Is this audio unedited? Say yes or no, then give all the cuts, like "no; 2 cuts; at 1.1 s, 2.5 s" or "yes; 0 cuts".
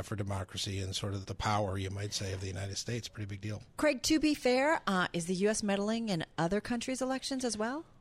no; 1 cut; at 1.2 s